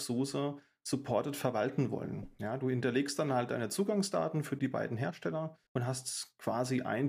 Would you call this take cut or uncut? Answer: cut